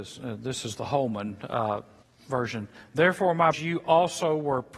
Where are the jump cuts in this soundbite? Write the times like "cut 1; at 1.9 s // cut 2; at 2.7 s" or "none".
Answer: cut 1; at 2.0 s // cut 2; at 3.5 s